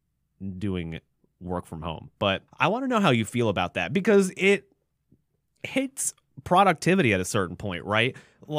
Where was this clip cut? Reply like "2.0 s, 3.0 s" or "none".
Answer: 1.1 s, 2.5 s